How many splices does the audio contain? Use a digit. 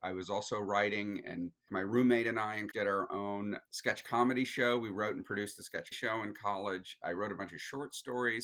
4